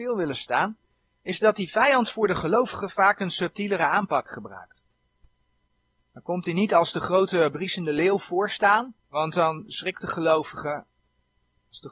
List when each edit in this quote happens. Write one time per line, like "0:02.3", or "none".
0:09.0